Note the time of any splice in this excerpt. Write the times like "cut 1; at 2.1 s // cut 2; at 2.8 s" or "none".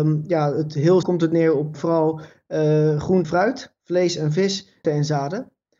cut 1; at 1.0 s // cut 2; at 1.7 s // cut 3; at 3.2 s // cut 4; at 4.8 s